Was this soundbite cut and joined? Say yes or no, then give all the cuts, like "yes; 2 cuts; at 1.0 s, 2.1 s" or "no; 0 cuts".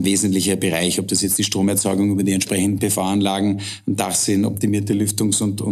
no; 0 cuts